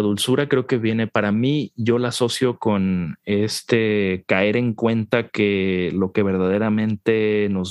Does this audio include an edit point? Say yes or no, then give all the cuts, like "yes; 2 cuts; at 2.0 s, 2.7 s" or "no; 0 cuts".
no; 0 cuts